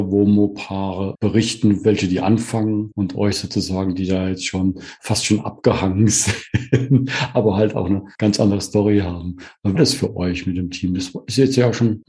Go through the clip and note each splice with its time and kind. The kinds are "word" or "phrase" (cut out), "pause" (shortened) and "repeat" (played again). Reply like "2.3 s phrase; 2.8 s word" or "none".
9.7 s phrase